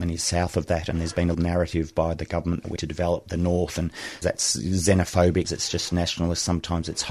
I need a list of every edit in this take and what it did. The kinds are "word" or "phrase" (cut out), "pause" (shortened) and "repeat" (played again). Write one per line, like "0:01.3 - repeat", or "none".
0:01.3 - word
0:02.3 - word
0:02.8 - word
0:04.2 - word
0:05.4 - word